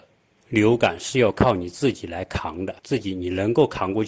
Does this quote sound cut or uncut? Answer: cut